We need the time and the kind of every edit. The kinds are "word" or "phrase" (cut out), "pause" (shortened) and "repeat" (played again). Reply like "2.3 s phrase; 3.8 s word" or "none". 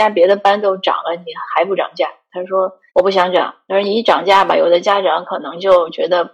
2.9 s pause